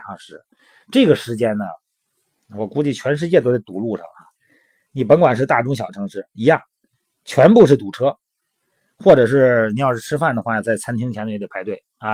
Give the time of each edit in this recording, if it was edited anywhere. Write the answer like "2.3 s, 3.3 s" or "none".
none

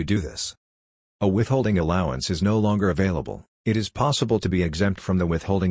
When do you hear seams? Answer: 3.5 s

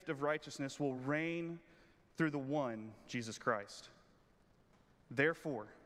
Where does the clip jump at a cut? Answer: none

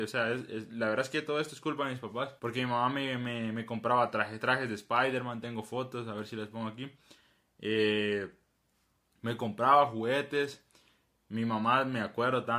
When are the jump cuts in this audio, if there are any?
2.4 s

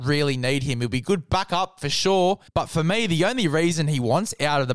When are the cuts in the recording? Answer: 2.5 s

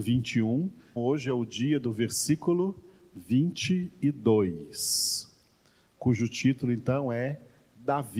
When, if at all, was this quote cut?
1.0 s

